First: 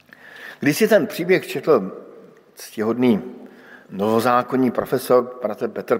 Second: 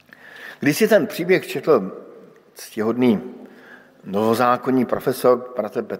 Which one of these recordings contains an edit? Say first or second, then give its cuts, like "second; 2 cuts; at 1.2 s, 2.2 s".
first; 1 cut; at 3.8 s